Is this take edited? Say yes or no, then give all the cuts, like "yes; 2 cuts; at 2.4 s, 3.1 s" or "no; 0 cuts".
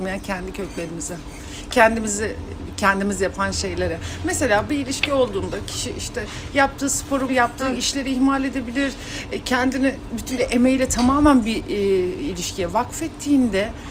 yes; 2 cuts; at 7.3 s, 10.4 s